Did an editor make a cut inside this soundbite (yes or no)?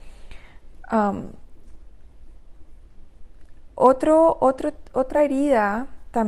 no